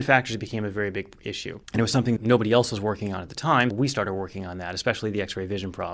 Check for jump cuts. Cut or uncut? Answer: cut